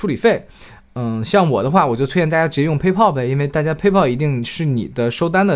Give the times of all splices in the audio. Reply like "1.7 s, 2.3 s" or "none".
none

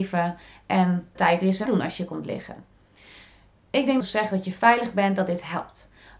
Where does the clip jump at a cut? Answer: 1.2 s, 1.7 s, 4.0 s

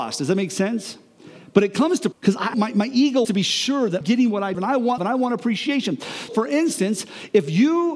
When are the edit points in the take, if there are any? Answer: 2.1 s, 2.5 s, 3.2 s, 4.0 s, 4.5 s, 5.0 s, 6.3 s

